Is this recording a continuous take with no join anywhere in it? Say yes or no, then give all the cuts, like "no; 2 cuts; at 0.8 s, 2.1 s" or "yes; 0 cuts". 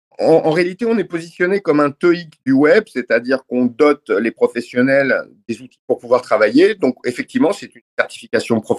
yes; 0 cuts